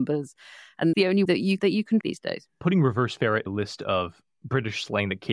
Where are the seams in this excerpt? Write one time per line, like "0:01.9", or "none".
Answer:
0:00.9
0:01.3
0:01.6
0:02.0
0:02.6
0:03.5